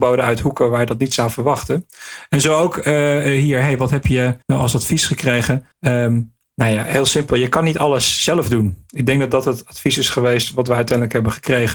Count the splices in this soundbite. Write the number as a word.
two